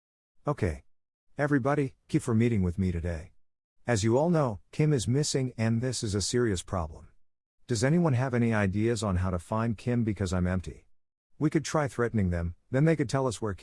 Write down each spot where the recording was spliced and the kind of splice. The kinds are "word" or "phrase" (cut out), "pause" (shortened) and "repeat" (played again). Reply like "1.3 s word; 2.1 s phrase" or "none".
2.1 s word